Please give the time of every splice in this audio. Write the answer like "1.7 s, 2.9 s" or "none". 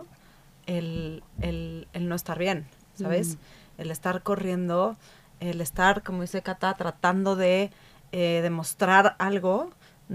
none

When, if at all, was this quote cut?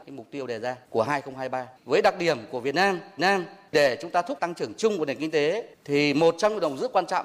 1.8 s, 3.2 s, 4.4 s

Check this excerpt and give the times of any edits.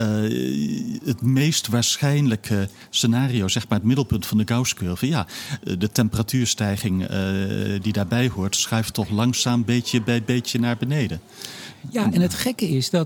none

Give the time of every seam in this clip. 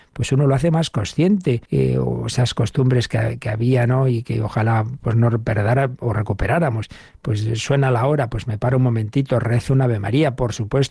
1.7 s

